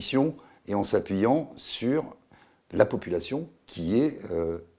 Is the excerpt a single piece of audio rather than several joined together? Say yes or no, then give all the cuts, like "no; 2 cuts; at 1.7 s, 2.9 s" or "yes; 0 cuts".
yes; 0 cuts